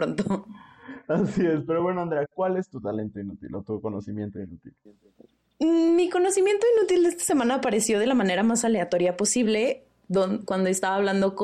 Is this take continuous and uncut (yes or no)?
yes